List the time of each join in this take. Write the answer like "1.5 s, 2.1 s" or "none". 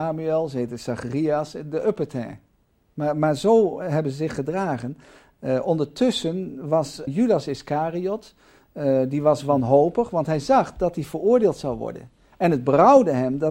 7.1 s